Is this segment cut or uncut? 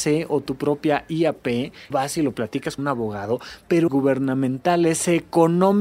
cut